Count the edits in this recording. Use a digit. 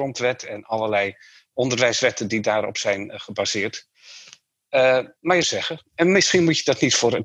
1